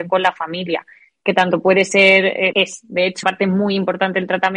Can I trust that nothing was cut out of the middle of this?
no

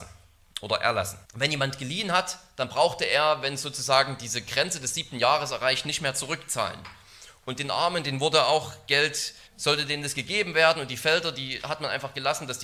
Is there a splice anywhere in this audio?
yes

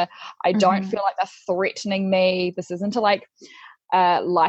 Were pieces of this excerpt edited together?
no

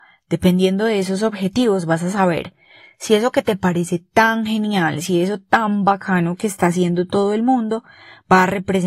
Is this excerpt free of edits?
yes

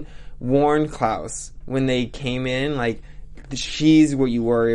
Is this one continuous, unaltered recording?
yes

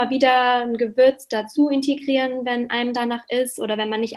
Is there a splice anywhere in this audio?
no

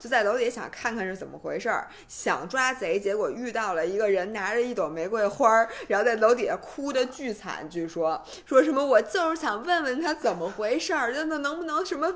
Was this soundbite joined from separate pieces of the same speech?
no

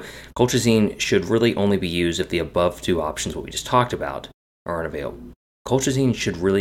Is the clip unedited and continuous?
yes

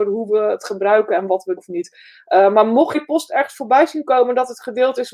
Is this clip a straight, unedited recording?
no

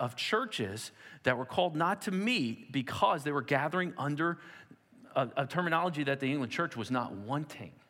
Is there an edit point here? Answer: yes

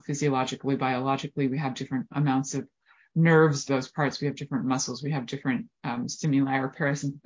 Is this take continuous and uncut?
no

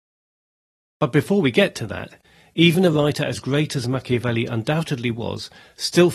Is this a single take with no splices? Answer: yes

